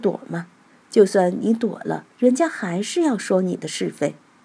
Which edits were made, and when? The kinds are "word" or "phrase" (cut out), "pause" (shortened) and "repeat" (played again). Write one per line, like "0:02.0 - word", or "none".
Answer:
0:02.1 - pause